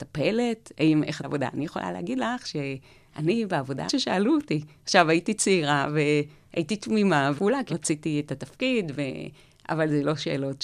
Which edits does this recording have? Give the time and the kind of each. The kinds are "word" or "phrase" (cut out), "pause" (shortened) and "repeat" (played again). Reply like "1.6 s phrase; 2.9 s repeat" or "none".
1.2 s phrase; 3.9 s phrase; 7.4 s phrase; 7.7 s phrase